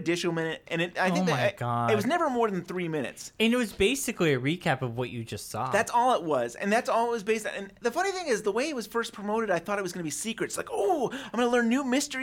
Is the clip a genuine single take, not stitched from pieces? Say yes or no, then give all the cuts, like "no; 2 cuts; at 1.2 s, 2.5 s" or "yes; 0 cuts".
yes; 0 cuts